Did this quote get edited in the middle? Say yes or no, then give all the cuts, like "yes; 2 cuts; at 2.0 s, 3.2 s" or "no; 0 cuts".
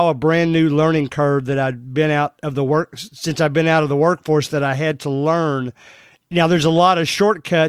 no; 0 cuts